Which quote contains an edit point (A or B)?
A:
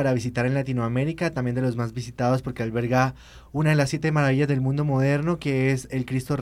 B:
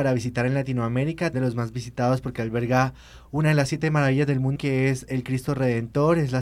B